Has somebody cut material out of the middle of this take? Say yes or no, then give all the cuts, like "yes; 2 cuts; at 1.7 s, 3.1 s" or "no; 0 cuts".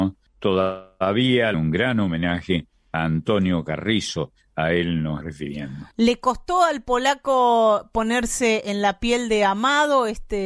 yes; 3 cuts; at 1.5 s, 5.2 s, 5.9 s